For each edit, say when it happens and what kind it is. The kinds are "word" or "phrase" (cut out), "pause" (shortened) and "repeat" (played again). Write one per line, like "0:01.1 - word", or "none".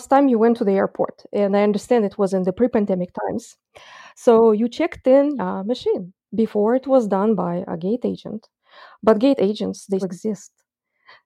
0:05.4 - word
0:06.2 - pause
0:10.0 - word